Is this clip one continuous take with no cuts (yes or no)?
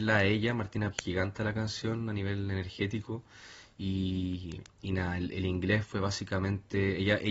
no